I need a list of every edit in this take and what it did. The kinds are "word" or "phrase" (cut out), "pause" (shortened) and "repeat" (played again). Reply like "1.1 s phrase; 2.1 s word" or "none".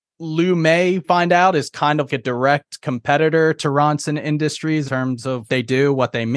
1.0 s word; 2.1 s word; 4.9 s word; 5.5 s word